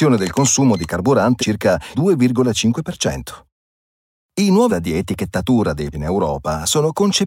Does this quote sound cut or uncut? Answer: cut